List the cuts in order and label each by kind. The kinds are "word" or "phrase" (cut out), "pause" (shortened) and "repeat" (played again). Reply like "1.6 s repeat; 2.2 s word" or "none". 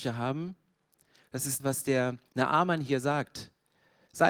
1.6 s word; 2.3 s pause